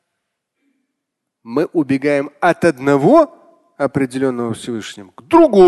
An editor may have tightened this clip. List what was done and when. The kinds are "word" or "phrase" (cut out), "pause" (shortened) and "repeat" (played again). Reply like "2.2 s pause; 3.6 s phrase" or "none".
none